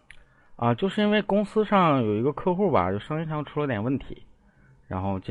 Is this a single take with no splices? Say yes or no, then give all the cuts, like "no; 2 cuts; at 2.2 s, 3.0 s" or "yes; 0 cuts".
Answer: yes; 0 cuts